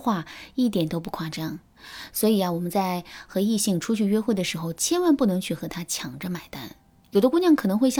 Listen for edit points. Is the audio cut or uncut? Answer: uncut